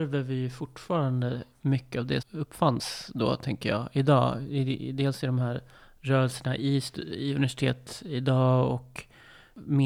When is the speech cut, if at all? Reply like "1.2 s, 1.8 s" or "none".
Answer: 2.2 s, 5.7 s